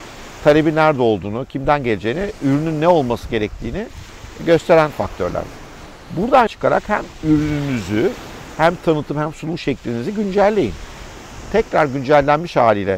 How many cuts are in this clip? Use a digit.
1